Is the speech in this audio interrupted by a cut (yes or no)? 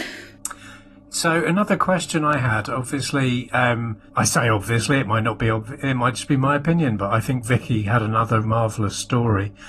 yes